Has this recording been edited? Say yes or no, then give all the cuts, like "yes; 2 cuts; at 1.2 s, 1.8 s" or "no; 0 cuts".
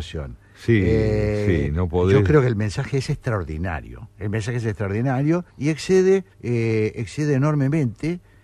yes; 3 cuts; at 4.1 s, 5.5 s, 6.3 s